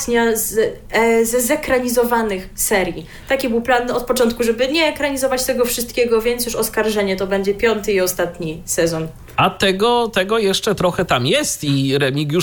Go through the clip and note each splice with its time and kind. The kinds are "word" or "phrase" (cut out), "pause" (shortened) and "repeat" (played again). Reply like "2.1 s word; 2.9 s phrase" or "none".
none